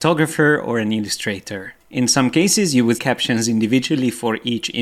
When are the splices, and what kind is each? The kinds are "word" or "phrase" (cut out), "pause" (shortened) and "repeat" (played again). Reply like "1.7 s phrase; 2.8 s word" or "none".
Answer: 2.9 s word